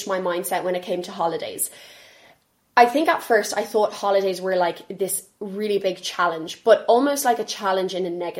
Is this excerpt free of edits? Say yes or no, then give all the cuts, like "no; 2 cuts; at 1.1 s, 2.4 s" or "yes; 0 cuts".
yes; 0 cuts